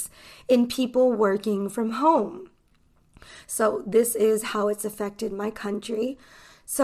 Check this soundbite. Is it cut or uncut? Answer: uncut